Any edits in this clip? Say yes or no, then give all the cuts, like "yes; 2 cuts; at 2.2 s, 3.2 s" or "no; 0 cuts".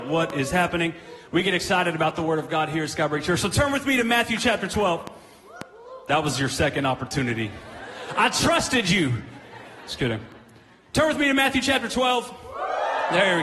no; 0 cuts